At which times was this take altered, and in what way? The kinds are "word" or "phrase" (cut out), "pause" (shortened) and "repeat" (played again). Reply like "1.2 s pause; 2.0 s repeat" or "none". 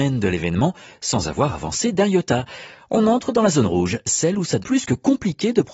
4.6 s word